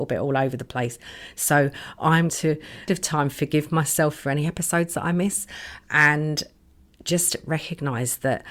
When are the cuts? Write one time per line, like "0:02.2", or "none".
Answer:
0:02.3
0:02.9